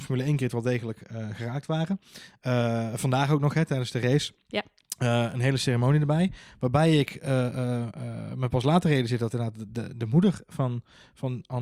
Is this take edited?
no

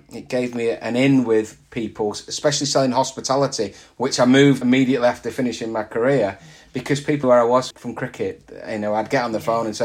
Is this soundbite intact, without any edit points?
no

